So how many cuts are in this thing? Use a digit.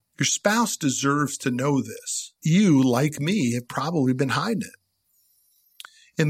1